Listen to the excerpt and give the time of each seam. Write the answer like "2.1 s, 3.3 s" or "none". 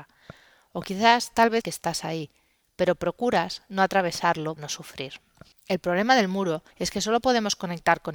1.6 s, 4.6 s, 5.5 s, 6.7 s